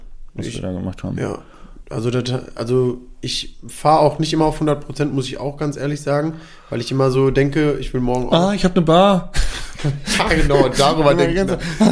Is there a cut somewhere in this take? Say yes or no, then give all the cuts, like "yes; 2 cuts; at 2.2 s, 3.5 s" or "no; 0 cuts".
no; 0 cuts